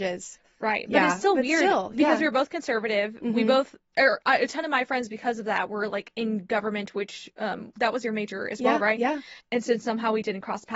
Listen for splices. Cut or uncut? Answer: cut